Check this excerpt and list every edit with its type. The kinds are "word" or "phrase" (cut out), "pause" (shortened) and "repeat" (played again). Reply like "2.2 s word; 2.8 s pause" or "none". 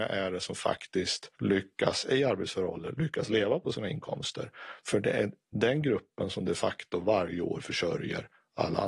1.4 s pause